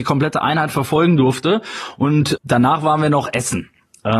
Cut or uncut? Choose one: cut